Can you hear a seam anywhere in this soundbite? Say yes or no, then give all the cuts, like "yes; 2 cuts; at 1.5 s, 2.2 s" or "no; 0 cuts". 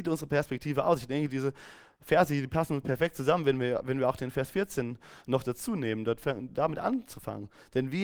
no; 0 cuts